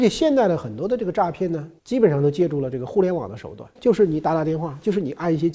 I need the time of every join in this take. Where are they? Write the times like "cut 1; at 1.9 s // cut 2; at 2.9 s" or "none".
cut 1; at 1.8 s // cut 2; at 3.8 s